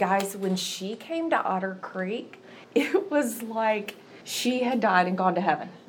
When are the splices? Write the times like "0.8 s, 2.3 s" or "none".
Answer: 2.6 s, 4.2 s